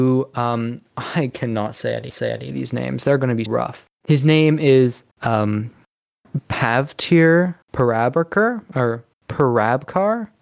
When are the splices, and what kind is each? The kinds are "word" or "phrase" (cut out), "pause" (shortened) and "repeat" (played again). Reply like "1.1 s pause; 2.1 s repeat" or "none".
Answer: 2.1 s repeat; 3.5 s word; 4.0 s pause; 5.1 s pause; 7.6 s pause; 9.1 s pause